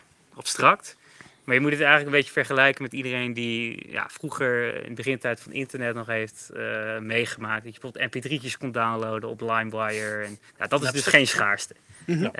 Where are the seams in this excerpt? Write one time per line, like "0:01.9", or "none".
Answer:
0:10.5